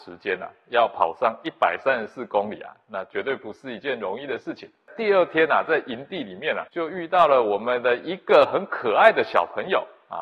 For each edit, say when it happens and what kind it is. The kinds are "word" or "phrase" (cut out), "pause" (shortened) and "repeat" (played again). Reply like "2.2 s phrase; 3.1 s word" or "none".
6.7 s pause

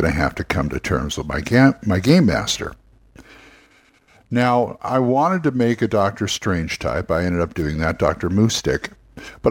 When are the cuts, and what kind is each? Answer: 4.8 s word

